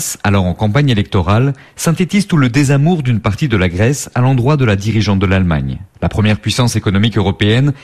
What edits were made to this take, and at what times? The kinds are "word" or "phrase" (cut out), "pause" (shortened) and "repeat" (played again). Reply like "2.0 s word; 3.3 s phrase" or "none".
5.9 s pause